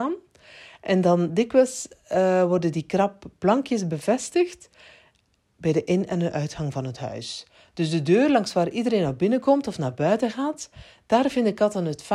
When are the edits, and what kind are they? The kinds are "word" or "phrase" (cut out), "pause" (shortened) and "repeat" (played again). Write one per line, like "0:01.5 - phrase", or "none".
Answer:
none